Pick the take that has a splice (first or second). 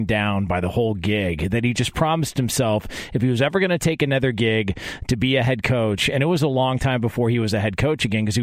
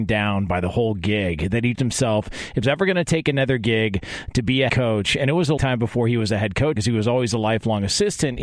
second